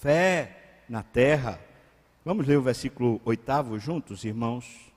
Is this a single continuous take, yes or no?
yes